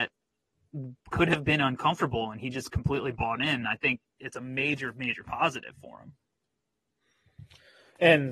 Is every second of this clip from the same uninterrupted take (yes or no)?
yes